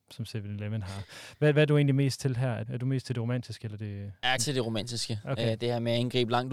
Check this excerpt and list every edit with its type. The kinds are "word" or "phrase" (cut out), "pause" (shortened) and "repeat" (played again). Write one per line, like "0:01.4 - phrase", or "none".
0:02.7 - word
0:04.4 - word